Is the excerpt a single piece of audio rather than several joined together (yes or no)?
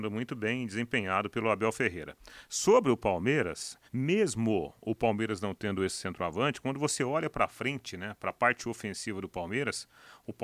no